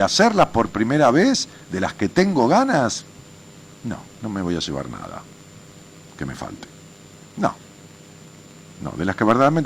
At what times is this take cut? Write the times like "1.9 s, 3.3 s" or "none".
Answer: none